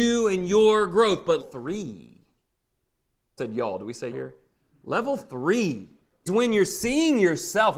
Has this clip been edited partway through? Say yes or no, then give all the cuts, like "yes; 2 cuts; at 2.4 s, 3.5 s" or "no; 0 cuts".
yes; 4 cuts; at 1.4 s, 3.4 s, 4.1 s, 6.3 s